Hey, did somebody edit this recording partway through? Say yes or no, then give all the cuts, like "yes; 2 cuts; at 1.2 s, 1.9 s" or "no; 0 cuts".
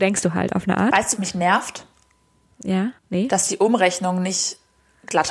yes; 2 cuts; at 1.2 s, 3.0 s